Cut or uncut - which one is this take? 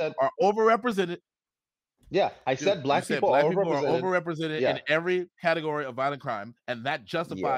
uncut